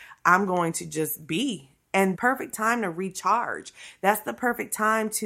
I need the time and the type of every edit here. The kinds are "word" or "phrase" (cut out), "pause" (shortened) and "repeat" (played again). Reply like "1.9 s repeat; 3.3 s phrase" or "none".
2.1 s word

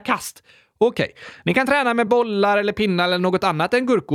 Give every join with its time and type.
none

